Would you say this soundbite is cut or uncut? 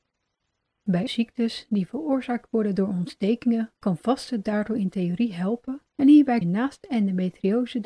cut